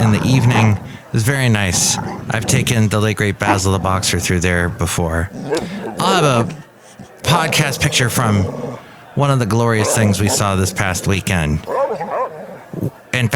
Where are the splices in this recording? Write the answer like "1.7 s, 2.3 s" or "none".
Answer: none